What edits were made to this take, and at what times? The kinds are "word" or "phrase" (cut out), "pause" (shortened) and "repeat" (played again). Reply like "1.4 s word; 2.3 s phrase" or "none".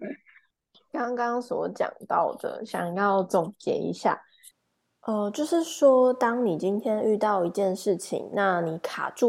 none